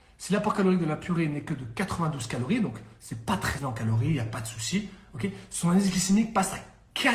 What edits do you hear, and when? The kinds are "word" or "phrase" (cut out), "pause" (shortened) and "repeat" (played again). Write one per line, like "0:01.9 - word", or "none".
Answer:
0:03.6 - word